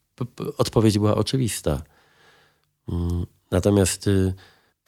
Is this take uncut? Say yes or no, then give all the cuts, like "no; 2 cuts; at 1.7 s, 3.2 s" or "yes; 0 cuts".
yes; 0 cuts